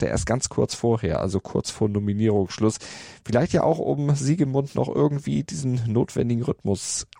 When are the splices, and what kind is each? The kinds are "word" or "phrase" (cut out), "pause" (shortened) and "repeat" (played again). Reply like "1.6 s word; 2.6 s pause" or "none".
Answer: none